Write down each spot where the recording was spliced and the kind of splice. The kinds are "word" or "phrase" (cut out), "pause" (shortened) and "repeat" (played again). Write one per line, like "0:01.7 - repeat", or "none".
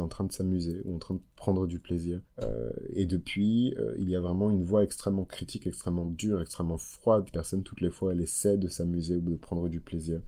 0:02.2 - pause
0:07.3 - phrase